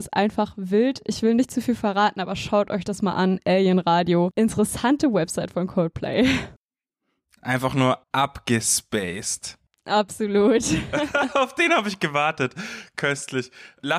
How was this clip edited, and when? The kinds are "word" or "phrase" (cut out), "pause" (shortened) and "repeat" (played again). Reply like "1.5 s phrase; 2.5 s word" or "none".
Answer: 8.0 s pause